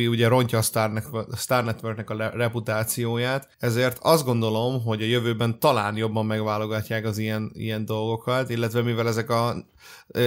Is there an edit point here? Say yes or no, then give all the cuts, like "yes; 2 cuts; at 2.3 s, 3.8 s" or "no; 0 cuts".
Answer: yes; 1 cut; at 3.5 s